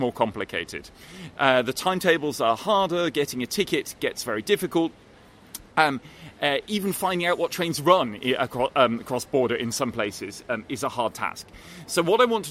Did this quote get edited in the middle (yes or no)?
no